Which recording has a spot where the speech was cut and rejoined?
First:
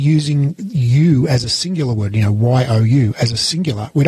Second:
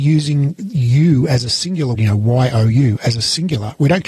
second; 1 cut; at 1.9 s

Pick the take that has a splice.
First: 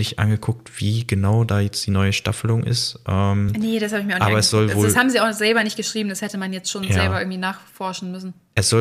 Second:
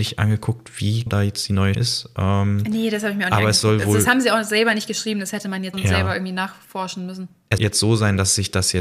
second; 4 cuts; at 1.1 s, 1.7 s, 5.7 s, 7.6 s

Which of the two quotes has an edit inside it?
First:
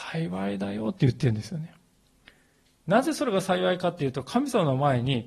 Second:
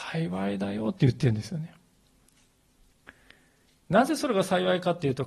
first; 1 cut; at 2.3 s

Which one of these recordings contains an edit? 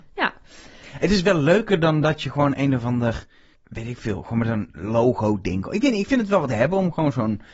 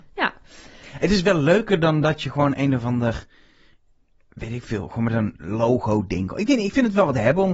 first; 1 cut; at 3.5 s

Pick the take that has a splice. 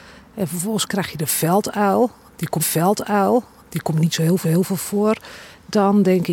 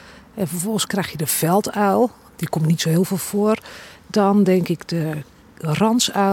first; 2 cuts; at 2.6 s, 4.4 s

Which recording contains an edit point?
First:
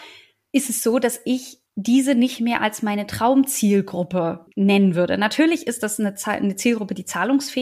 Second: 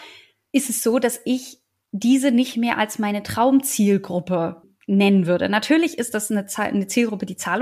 first; 2 cuts; at 1.7 s, 4.5 s

